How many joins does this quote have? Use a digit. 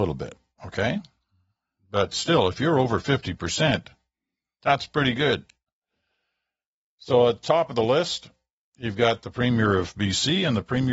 0